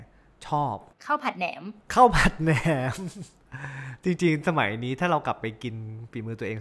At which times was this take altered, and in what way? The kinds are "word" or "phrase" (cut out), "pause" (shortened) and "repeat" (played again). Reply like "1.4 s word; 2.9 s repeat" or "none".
0.9 s pause